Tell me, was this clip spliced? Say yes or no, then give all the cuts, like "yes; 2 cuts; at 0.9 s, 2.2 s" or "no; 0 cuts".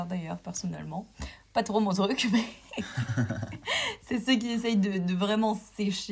no; 0 cuts